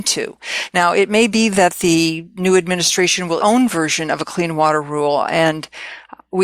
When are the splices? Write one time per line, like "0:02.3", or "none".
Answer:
0:03.4